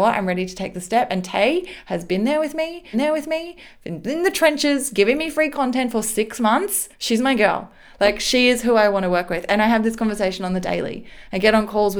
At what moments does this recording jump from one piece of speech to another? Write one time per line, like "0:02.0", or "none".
0:02.9
0:06.9